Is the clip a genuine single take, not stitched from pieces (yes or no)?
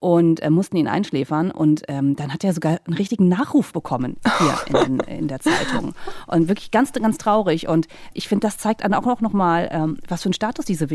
no